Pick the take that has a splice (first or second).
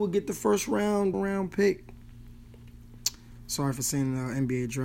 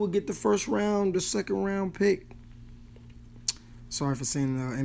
first